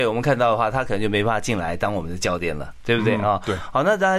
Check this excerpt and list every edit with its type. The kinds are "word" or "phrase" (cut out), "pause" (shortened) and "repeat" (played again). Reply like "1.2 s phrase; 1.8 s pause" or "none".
none